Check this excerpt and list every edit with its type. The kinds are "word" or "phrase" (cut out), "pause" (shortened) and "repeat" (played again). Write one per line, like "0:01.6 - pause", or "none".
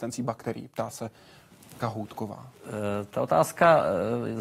0:01.8 - word